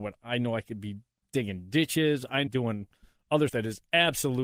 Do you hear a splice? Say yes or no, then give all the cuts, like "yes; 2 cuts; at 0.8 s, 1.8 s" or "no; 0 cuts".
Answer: yes; 3 cuts; at 1.2 s, 2.5 s, 3.5 s